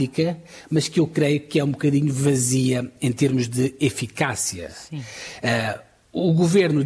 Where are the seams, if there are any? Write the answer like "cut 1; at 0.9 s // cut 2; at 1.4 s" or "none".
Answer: none